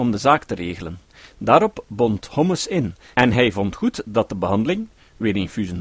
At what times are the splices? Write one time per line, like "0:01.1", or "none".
none

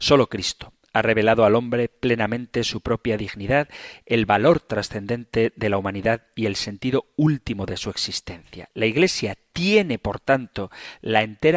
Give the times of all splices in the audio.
none

